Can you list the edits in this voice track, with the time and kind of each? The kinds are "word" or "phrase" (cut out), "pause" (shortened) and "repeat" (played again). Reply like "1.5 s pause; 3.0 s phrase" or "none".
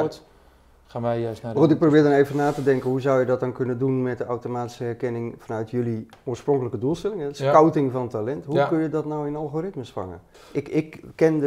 10.3 s pause